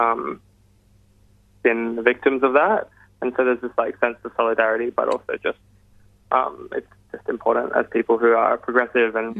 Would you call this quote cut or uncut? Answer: uncut